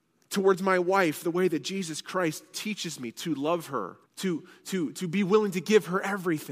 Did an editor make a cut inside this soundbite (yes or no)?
yes